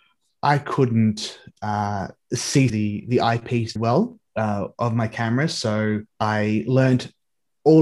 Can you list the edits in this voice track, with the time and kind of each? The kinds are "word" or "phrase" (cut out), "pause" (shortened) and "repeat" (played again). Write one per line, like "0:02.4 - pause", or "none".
0:02.7 - word
0:03.8 - word
0:04.3 - pause
0:06.1 - pause